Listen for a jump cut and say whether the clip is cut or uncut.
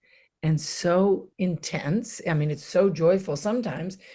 cut